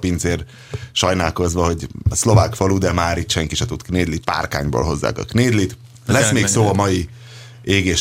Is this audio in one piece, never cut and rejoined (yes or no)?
no